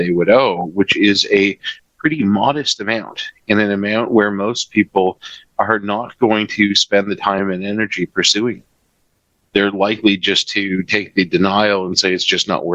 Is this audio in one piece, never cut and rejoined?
yes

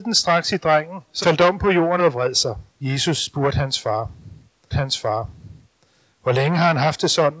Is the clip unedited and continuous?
no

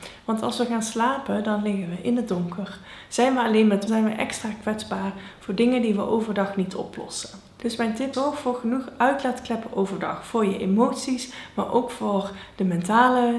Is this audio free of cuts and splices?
no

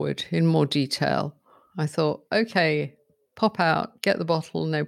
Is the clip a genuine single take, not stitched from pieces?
yes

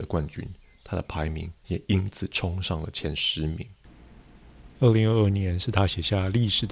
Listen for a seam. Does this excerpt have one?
yes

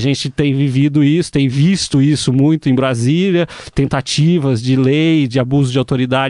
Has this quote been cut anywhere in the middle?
no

